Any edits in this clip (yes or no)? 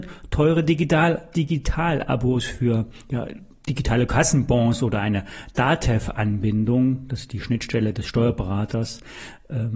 no